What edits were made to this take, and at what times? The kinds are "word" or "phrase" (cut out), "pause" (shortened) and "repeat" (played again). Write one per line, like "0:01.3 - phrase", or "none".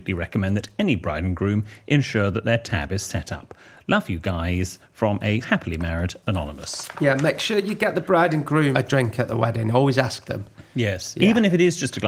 0:05.4 - word
0:08.7 - word
0:10.7 - pause